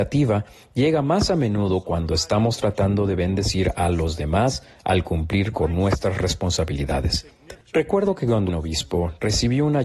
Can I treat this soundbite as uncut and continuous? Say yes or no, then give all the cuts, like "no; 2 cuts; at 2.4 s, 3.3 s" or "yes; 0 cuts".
no; 2 cuts; at 7.6 s, 8.5 s